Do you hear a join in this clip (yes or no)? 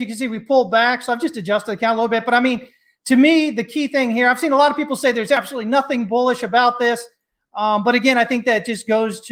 no